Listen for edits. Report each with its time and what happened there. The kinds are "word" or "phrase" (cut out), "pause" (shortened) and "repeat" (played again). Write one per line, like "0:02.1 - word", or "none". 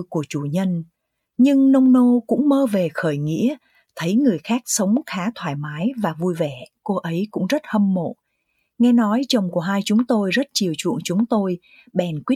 none